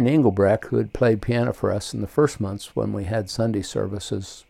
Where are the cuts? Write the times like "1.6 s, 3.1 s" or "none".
none